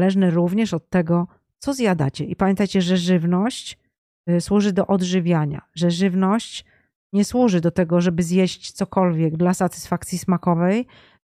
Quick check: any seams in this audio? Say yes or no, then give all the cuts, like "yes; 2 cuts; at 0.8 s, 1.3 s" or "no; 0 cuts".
no; 0 cuts